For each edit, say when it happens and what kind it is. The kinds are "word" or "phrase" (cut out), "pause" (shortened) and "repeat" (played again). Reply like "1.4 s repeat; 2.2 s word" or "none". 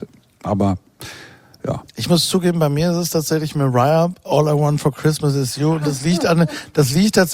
1.9 s pause